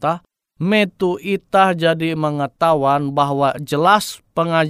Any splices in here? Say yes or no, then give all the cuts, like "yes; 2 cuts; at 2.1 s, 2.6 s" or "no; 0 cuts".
no; 0 cuts